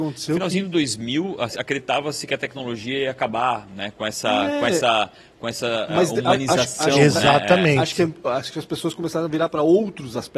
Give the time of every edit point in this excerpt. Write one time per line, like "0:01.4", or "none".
none